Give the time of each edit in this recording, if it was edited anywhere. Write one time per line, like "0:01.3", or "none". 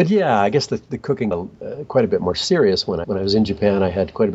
0:01.3
0:03.0